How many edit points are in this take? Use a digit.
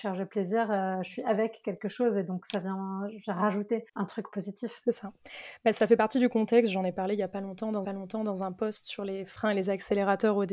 2